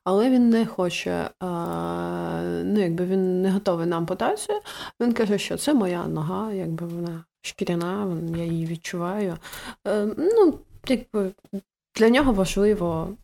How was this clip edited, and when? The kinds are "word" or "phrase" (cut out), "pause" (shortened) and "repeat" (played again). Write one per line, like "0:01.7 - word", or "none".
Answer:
none